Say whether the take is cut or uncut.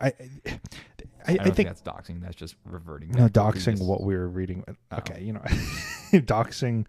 uncut